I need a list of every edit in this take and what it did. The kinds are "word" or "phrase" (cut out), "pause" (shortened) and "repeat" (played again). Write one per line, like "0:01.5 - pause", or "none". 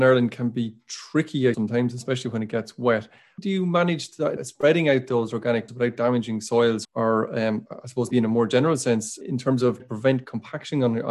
0:01.5 - word
0:03.4 - word
0:04.4 - word
0:05.7 - word
0:06.8 - word
0:08.1 - word
0:09.2 - word
0:09.8 - word